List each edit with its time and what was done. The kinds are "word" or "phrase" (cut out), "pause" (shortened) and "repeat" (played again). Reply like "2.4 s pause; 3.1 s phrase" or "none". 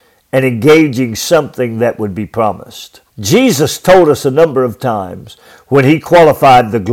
3.1 s pause